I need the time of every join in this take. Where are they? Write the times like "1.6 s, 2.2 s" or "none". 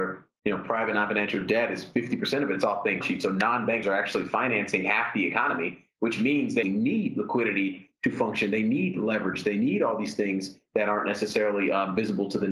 3.0 s, 3.8 s, 6.6 s

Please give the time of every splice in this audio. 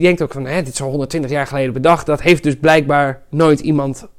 none

